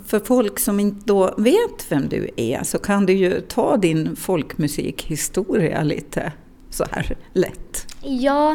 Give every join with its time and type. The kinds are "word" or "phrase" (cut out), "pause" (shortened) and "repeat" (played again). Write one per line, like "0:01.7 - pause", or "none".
none